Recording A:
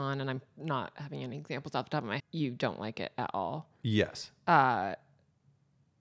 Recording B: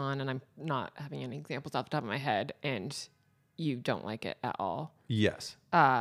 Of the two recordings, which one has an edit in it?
A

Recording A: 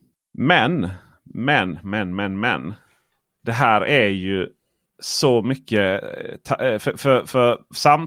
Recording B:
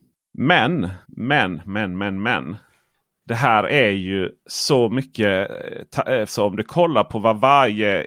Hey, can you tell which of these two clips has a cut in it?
B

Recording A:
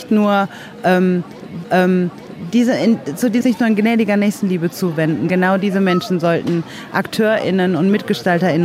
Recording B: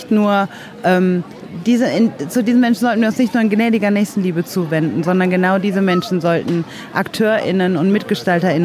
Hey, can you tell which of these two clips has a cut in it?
A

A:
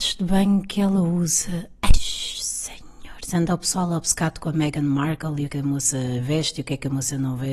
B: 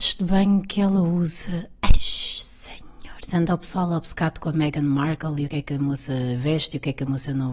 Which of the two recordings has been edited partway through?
A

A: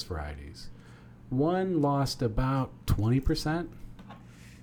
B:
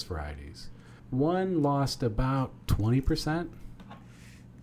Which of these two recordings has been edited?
B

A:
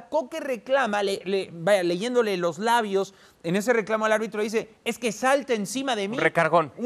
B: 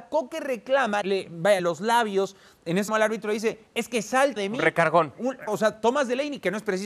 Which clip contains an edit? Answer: B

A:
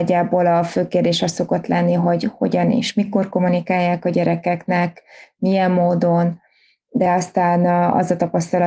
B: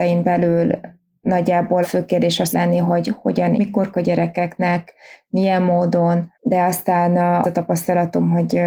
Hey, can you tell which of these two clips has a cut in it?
B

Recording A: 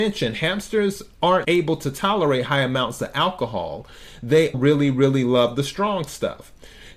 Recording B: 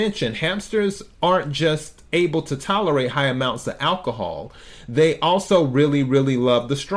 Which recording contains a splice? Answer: A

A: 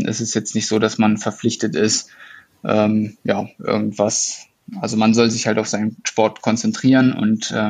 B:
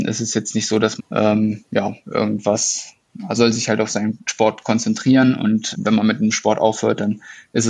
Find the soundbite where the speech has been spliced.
B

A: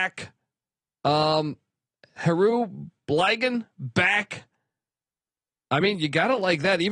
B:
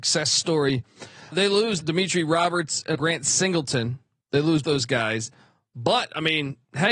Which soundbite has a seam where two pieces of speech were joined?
B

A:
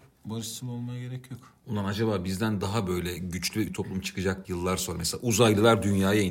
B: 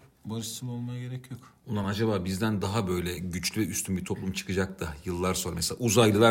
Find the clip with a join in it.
A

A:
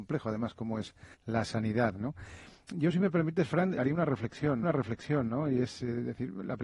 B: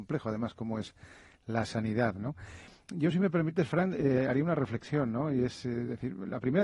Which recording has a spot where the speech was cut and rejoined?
A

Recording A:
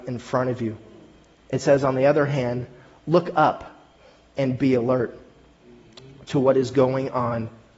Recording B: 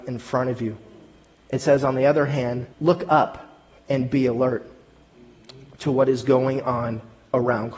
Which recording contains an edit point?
B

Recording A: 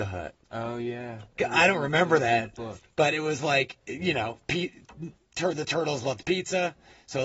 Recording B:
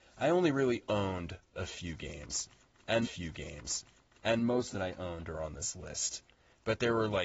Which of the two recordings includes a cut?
B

